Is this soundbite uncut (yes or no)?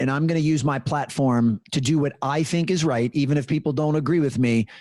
yes